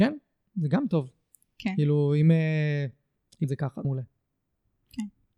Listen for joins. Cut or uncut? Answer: cut